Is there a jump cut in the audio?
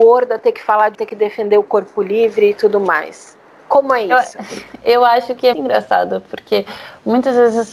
yes; 2 cuts; at 0.9 s, 5.5 s

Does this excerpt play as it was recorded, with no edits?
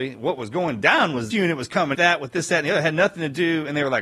no; 2 cuts; at 1.3 s, 1.9 s

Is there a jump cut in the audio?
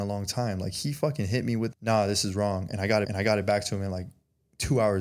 yes; 2 cuts; at 1.7 s, 3.0 s

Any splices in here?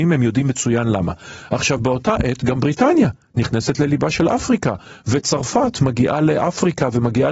no; 0 cuts

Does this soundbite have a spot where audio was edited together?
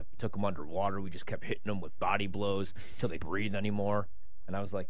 yes; 1 cut; at 3.2 s

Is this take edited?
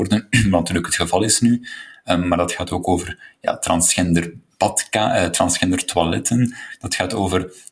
no; 0 cuts

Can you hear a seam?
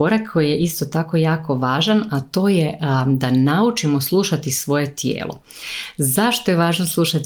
no; 0 cuts

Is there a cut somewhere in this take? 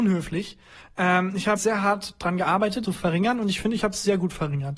yes; 2 cuts; at 1.6 s, 2.8 s

